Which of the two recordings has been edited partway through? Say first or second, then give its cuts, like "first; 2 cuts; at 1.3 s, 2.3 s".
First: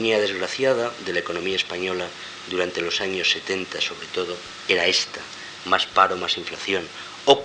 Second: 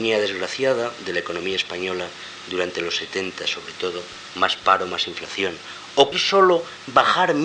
second; 3 cuts; at 3.0 s, 4.3 s, 6.1 s